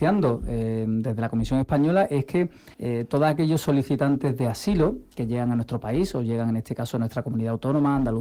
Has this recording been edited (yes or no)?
yes